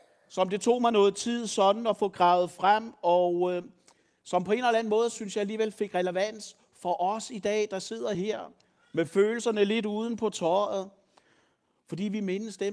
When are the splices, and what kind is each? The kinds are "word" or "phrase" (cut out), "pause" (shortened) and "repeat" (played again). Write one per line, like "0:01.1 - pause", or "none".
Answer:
none